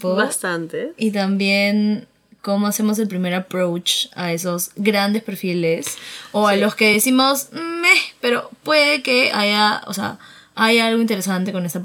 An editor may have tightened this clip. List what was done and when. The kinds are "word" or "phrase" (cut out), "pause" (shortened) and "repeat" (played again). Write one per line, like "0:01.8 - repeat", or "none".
none